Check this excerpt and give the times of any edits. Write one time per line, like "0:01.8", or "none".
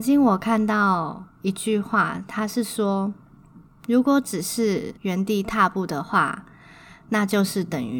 0:01.3
0:03.2
0:05.0